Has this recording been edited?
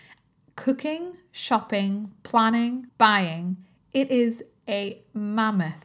yes; 1 cut; at 2.9 s

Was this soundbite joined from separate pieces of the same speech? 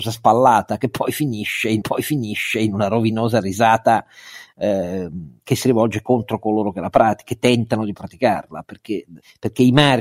yes; 1 cut; at 1.8 s

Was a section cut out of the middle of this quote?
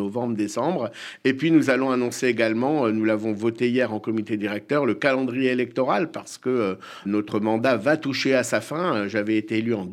yes; 1 cut; at 7.0 s

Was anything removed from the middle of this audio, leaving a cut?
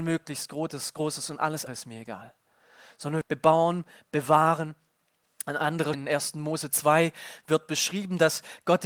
yes; 3 cuts; at 1.7 s, 3.2 s, 5.9 s

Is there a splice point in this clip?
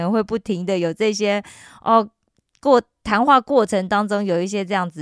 no; 0 cuts

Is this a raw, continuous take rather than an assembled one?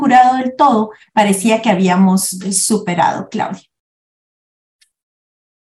yes; 0 cuts

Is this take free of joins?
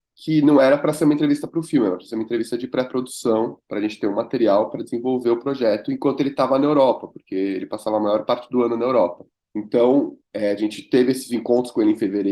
no; 1 cut; at 9.4 s

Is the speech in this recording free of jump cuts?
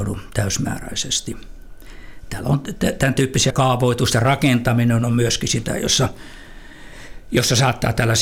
no; 1 cut; at 3.5 s

